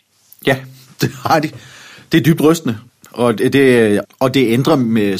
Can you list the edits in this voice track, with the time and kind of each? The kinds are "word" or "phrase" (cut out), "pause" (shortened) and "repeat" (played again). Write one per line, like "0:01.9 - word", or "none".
0:02.9 - pause
0:04.0 - word